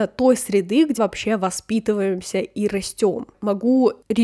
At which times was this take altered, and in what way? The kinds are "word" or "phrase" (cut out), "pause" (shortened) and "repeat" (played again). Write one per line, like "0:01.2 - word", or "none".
0:01.0 - word
0:03.3 - pause